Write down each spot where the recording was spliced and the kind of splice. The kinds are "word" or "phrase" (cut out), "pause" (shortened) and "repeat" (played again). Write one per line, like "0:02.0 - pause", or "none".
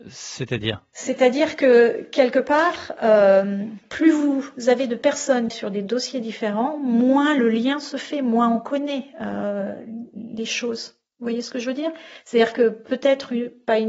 0:05.5 - phrase